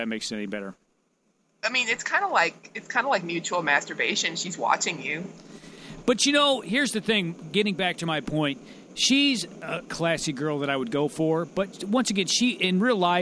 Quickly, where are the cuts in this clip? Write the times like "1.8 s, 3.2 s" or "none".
9.9 s